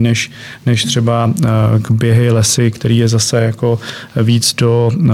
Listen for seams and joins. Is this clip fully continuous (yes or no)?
yes